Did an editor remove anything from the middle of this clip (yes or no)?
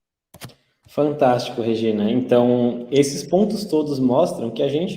no